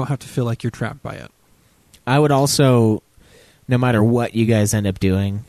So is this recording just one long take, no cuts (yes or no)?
yes